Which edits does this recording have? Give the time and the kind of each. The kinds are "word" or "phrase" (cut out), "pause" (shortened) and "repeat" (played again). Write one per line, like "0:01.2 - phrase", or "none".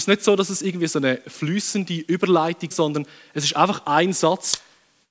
0:02.7 - phrase